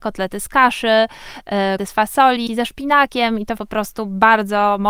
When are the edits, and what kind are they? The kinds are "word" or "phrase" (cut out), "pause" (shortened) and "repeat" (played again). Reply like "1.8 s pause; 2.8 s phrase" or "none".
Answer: 1.8 s word; 2.5 s word; 3.6 s word